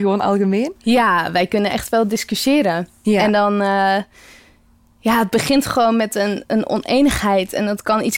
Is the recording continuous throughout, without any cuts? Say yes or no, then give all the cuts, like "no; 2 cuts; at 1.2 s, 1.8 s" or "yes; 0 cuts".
yes; 0 cuts